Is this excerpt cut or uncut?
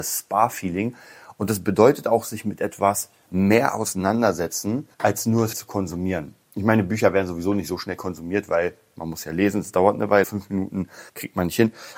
cut